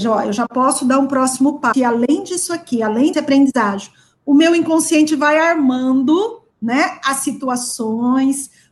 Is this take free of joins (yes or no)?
no